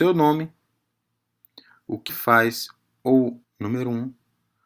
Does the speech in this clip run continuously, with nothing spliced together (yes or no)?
no